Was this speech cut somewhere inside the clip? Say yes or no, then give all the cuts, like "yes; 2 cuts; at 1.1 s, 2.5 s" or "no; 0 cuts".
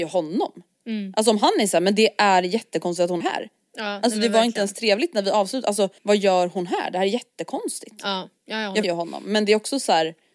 yes; 4 cuts; at 3.2 s, 6.0 s, 8.4 s, 8.8 s